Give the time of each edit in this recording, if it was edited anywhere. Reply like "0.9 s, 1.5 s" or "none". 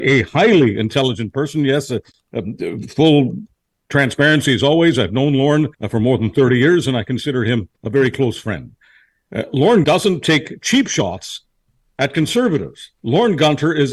5.7 s, 7.8 s, 9.8 s